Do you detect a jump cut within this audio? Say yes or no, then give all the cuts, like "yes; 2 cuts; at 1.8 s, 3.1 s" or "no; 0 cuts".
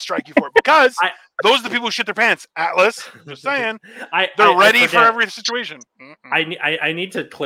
no; 0 cuts